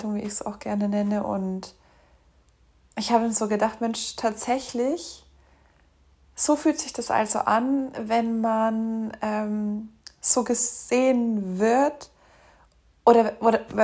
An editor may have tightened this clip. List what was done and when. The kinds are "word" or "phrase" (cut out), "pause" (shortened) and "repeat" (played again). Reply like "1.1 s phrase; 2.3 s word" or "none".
none